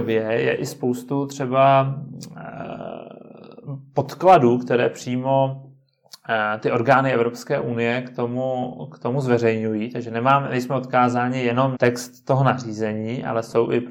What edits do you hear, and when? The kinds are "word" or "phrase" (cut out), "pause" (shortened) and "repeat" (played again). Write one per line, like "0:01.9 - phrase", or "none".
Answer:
0:11.8 - word